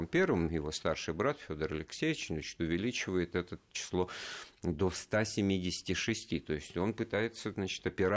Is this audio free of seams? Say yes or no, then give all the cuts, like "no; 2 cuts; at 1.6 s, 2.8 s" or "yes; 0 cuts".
yes; 0 cuts